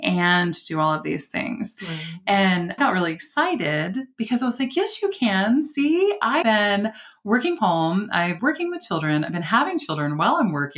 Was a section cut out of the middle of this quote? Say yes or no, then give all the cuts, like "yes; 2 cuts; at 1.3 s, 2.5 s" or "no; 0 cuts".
yes; 4 cuts; at 2.8 s, 6.4 s, 7.6 s, 8.4 s